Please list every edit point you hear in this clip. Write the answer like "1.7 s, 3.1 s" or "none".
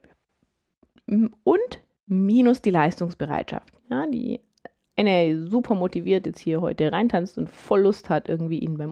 none